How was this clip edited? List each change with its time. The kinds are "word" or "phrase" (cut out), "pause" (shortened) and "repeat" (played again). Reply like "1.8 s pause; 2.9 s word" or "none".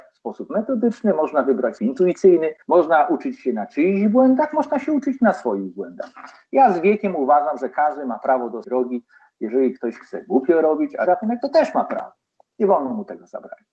1.8 s word; 2.6 s pause; 8.6 s word; 11.1 s phrase